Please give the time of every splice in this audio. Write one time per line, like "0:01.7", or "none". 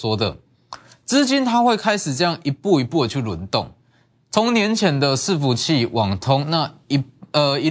none